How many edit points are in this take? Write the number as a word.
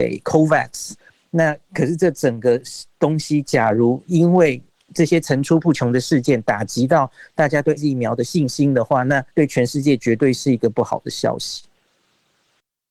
two